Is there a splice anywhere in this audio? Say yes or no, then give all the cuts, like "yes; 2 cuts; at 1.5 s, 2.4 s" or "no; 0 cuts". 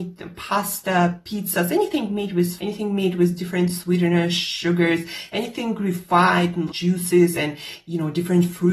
yes; 2 cuts; at 2.6 s, 6.7 s